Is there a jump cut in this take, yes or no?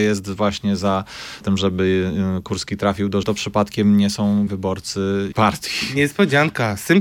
yes